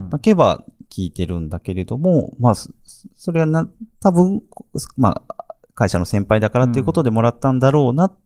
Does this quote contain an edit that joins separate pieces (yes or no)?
yes